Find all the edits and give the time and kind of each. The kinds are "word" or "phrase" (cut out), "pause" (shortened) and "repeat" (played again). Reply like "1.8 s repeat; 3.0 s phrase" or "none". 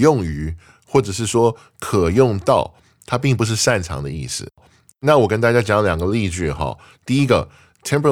none